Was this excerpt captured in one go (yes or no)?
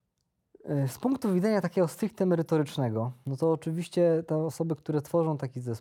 yes